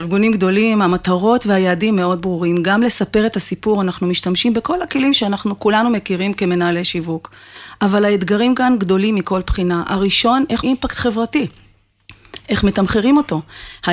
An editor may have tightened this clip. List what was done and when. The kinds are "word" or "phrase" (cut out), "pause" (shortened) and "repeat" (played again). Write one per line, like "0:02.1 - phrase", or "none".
0:10.6 - word